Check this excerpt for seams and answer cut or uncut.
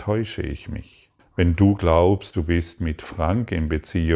cut